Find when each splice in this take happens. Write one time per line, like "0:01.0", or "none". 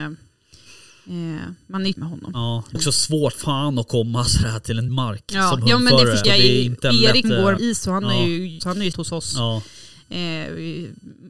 0:01.9
0:02.7
0:03.3
0:04.9
0:06.2
0:07.2
0:07.6
0:08.6
0:08.9